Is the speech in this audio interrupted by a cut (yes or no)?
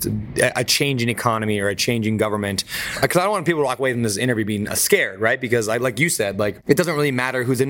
no